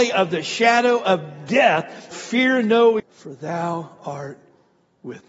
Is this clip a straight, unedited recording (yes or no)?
no